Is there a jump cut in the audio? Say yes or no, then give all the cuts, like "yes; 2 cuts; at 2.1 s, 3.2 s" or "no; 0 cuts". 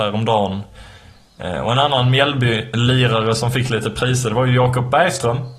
no; 0 cuts